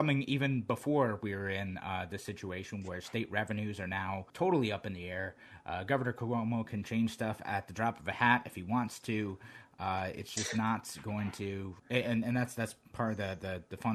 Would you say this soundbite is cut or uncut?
cut